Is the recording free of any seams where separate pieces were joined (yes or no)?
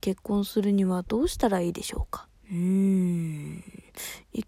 no